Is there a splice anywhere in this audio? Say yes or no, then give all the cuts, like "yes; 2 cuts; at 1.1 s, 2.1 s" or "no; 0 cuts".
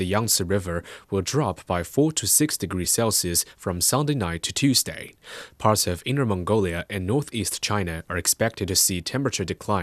no; 0 cuts